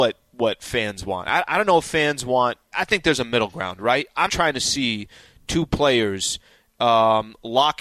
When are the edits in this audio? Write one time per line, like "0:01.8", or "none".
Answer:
0:02.7
0:04.3